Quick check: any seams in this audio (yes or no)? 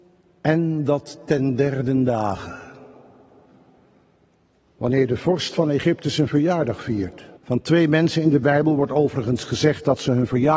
yes